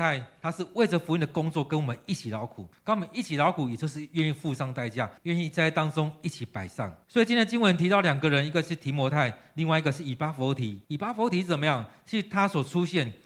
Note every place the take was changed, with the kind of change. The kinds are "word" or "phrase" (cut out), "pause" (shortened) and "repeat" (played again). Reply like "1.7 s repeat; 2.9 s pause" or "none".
2.7 s pause; 5.2 s pause; 7.0 s pause; 10.8 s pause